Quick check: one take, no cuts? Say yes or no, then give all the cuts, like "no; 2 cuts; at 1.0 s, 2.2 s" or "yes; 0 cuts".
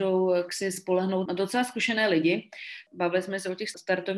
no; 1 cut; at 1.3 s